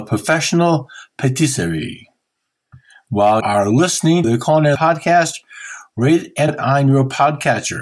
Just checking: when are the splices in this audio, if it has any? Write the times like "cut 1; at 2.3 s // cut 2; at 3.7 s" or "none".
cut 1; at 3.4 s // cut 2; at 4.2 s // cut 3; at 4.7 s // cut 4; at 6.5 s